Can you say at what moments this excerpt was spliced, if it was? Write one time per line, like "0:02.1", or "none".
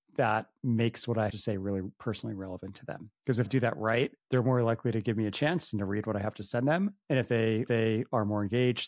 0:01.3
0:03.5
0:04.2
0:07.0
0:07.7